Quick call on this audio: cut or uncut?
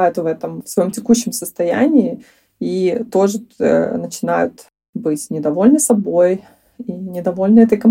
uncut